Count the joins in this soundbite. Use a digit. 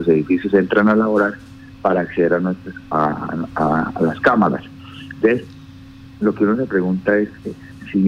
0